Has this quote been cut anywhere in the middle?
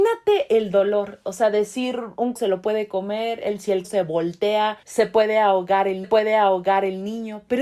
yes; 4 cuts; at 2.4 s, 3.8 s, 4.8 s, 6.0 s

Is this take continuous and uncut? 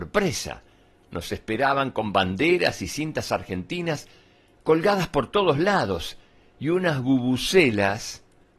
yes; 0 cuts

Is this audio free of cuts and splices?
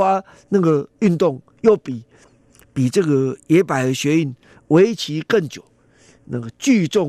yes; 0 cuts

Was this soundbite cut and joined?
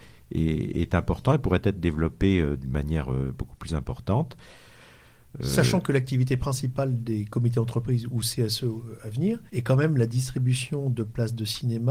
yes; 1 cut; at 9.5 s

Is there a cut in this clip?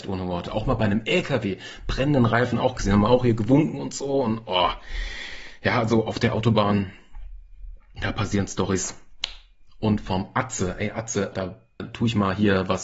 yes; 2 cuts; at 11.3 s, 11.8 s

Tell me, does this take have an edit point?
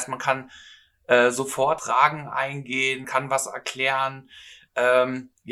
yes; 2 cuts; at 1.8 s, 3.0 s

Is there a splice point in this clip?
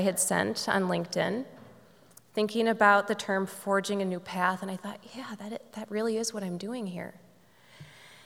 no; 0 cuts

